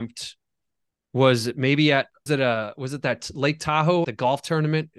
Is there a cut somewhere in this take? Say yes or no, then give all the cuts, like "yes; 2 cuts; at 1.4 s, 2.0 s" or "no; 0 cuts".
yes; 2 cuts; at 2.3 s, 4.0 s